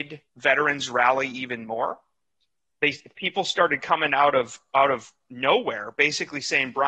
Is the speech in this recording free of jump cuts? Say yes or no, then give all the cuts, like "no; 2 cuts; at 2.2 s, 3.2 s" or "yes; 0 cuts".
yes; 0 cuts